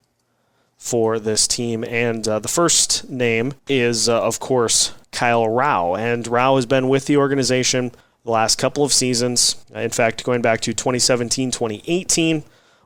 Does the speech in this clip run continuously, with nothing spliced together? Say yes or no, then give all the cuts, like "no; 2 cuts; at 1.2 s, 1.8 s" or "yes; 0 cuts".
no; 4 cuts; at 3.6 s, 5.0 s, 8.0 s, 9.6 s